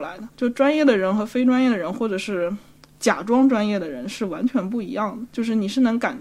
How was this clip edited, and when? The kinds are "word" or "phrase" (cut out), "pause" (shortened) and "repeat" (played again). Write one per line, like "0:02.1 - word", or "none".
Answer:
none